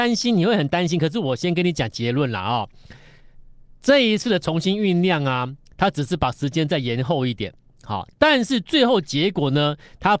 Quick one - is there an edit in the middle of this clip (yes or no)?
no